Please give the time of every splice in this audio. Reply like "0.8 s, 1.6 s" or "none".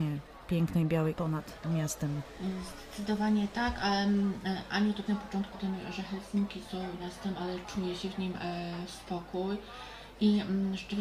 1.2 s, 5.1 s, 5.5 s, 7.0 s